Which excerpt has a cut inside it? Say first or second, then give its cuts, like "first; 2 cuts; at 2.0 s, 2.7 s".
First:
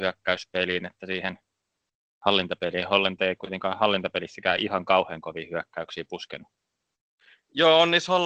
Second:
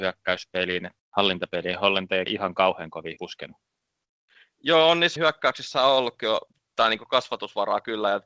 second; 4 cuts; at 1.0 s, 2.3 s, 3.2 s, 5.2 s